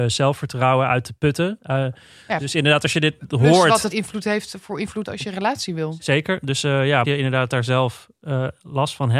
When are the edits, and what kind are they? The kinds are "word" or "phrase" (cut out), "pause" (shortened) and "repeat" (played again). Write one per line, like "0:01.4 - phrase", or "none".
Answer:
0:03.9 - word
0:05.1 - word
0:07.0 - word